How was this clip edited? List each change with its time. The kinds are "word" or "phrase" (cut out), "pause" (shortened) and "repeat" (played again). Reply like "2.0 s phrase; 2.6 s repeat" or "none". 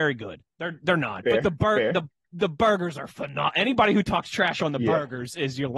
none